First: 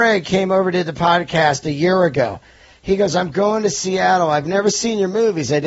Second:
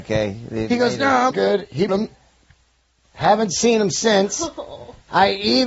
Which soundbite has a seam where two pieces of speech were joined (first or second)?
second